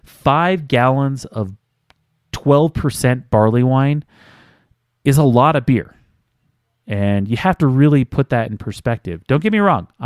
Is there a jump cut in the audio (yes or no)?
no